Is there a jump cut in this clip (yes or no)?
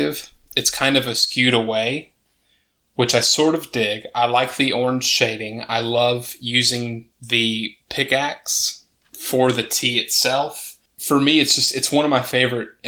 yes